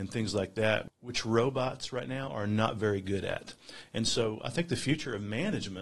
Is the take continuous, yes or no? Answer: yes